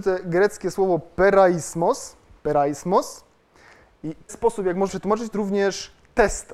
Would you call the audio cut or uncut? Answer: cut